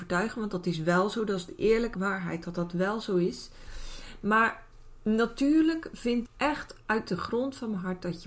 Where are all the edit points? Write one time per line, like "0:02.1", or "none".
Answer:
0:01.9
0:06.3